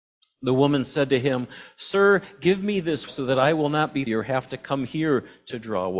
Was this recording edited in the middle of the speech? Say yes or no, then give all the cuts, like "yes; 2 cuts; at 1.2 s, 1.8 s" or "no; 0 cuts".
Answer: yes; 2 cuts; at 3.1 s, 4.1 s